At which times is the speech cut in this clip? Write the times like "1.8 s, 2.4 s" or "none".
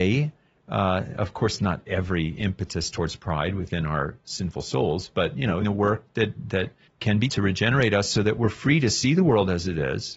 5.6 s, 6.9 s, 7.3 s